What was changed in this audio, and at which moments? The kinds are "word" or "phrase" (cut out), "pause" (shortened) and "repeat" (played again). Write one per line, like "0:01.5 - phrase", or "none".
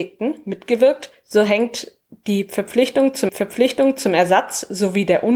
0:03.3 - repeat